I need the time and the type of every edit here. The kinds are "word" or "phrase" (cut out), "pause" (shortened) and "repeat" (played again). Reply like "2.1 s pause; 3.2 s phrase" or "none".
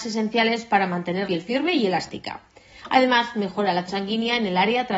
1.3 s word; 3.9 s word